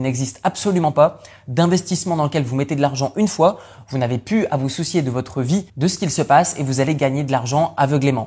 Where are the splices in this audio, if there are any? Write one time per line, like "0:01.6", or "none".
0:05.7